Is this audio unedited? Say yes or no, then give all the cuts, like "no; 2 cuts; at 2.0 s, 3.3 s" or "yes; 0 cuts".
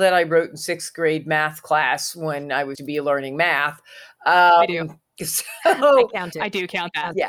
no; 1 cut; at 2.7 s